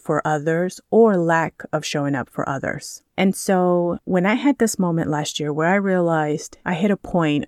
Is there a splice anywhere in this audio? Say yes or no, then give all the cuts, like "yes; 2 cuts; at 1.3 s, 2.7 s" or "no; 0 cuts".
no; 0 cuts